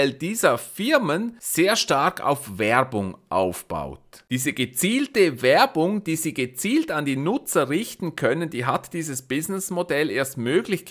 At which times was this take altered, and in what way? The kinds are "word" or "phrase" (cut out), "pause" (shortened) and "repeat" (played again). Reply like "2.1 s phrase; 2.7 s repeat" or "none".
none

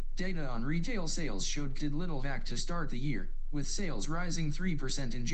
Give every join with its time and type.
1.8 s word; 2.2 s word

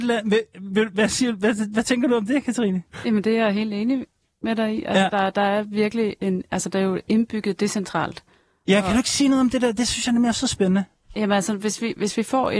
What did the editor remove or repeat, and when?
none

